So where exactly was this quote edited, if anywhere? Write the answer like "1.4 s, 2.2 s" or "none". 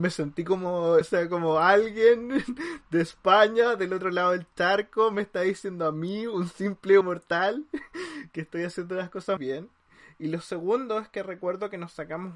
1.0 s, 7.0 s, 9.4 s